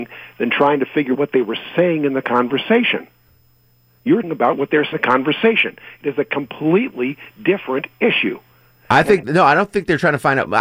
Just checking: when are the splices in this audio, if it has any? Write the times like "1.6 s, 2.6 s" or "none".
1.1 s, 4.2 s, 4.9 s